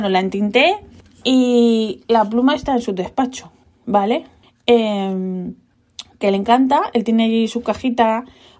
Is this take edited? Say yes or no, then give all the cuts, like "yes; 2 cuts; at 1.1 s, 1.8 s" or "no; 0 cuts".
no; 0 cuts